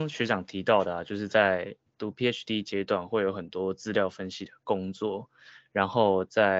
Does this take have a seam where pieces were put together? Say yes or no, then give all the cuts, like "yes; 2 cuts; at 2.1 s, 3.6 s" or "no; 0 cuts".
no; 0 cuts